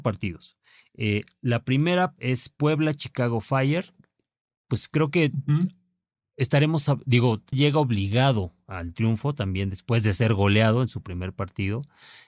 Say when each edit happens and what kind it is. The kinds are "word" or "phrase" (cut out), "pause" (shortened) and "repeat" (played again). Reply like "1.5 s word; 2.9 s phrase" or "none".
7.5 s word